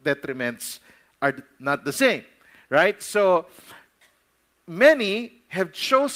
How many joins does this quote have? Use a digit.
0